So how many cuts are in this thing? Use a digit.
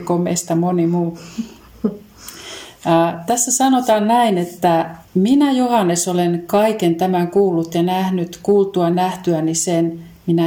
2